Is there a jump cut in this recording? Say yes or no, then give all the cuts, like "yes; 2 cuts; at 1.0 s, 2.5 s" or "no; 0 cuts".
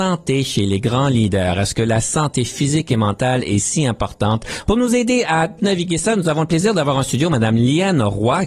no; 0 cuts